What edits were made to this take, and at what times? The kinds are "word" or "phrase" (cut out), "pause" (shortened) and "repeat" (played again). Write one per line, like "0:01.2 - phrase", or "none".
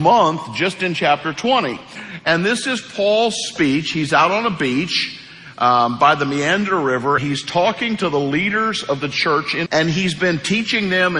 0:07.2 - word
0:09.7 - word